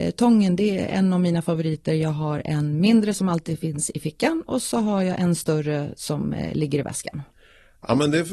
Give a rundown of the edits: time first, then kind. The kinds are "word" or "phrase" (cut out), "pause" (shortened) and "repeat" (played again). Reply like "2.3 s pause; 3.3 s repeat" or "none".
none